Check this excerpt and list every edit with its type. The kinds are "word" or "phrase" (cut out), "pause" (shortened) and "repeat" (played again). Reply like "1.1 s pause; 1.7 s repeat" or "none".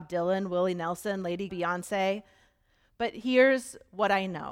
1.5 s word